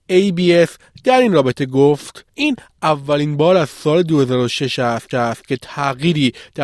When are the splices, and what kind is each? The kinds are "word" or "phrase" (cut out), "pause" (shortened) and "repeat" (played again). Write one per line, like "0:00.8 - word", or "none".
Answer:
0:02.3 - pause
0:05.1 - repeat